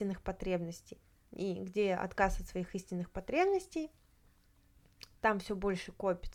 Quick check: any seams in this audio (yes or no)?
no